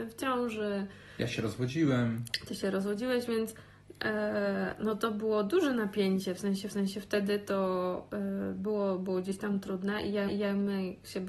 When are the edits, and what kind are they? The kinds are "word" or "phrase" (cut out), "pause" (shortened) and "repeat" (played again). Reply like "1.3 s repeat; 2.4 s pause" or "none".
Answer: 6.7 s repeat; 10.3 s repeat